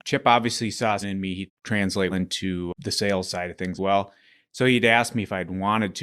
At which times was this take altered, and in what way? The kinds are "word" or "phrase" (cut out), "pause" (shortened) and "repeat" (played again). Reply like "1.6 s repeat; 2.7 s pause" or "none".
1.0 s word; 1.5 s word; 2.1 s word; 3.8 s word